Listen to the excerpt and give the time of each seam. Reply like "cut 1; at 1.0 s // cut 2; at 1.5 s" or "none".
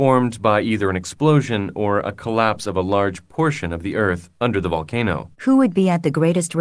cut 1; at 5.3 s